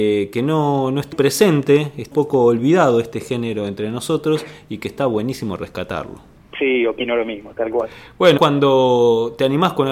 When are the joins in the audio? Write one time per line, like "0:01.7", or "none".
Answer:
0:01.1
0:02.1
0:06.4
0:08.4